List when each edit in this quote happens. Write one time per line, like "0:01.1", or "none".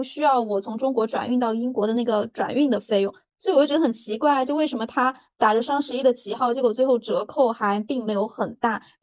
none